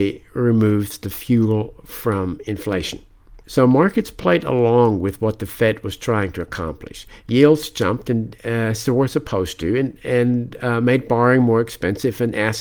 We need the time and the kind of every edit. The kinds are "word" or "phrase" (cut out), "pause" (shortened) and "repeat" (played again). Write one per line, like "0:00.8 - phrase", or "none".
none